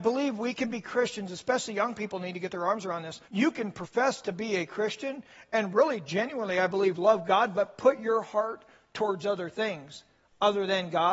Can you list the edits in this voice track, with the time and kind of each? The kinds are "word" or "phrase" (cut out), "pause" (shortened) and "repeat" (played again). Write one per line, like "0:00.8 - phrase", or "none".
0:03.2 - pause